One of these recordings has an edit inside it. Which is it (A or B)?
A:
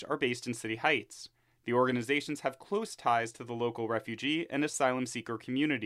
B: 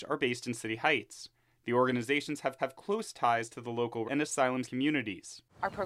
B